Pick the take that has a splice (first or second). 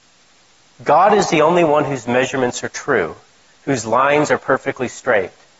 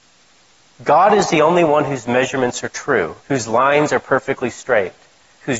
second